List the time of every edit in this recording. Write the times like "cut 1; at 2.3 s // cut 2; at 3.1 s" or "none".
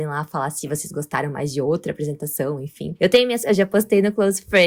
cut 1; at 3.4 s

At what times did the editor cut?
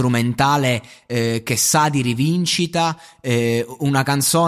none

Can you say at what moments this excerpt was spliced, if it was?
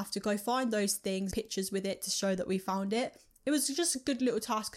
cut 1; at 1.3 s

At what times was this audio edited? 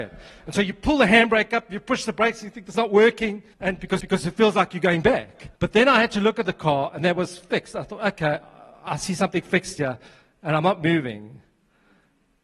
cut 1; at 2.7 s // cut 2; at 3.5 s // cut 3; at 4.0 s // cut 4; at 5.6 s // cut 5; at 6.4 s // cut 6; at 8.9 s

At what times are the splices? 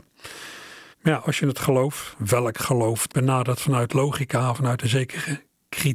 cut 1; at 0.9 s // cut 2; at 3.1 s

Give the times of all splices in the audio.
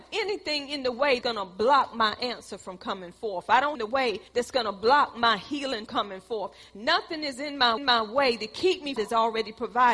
cut 1; at 1.2 s // cut 2; at 3.8 s // cut 3; at 4.3 s // cut 4; at 5.9 s // cut 5; at 7.8 s // cut 6; at 9.0 s

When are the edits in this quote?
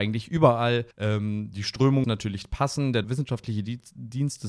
cut 1; at 0.9 s // cut 2; at 2.0 s // cut 3; at 3.0 s

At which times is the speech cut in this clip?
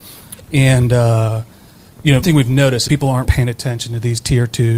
cut 1; at 2.2 s // cut 2; at 2.9 s // cut 3; at 3.2 s

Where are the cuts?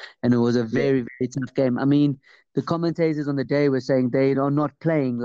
none

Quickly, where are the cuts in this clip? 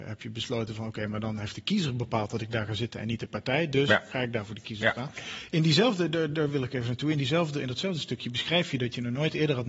none

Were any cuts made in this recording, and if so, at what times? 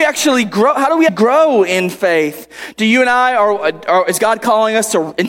cut 1; at 1.1 s

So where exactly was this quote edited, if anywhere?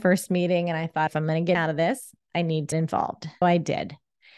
cut 1; at 1.1 s // cut 2; at 1.5 s // cut 3; at 2.7 s // cut 4; at 3.4 s

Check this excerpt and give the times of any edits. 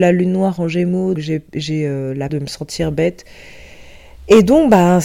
cut 1; at 1.1 s // cut 2; at 2.3 s

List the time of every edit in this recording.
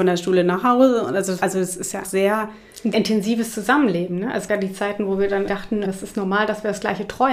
cut 1; at 1.4 s // cut 2; at 2.0 s // cut 3; at 2.9 s // cut 4; at 4.5 s // cut 5; at 5.5 s // cut 6; at 5.9 s

